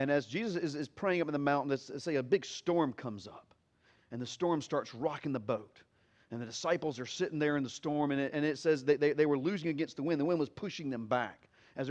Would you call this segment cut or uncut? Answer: uncut